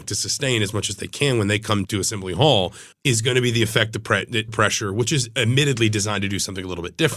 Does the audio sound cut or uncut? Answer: cut